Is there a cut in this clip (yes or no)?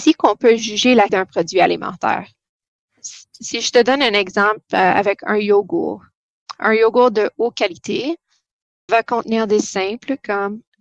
yes